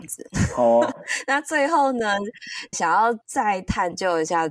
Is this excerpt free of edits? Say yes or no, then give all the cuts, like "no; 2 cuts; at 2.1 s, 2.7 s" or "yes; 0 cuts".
no; 3 cuts; at 0.9 s, 2.7 s, 3.2 s